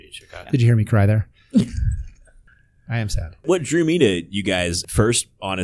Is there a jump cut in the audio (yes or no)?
no